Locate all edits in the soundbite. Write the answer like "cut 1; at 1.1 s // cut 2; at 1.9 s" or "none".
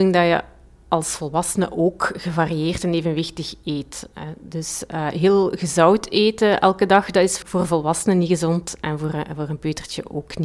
cut 1; at 7.4 s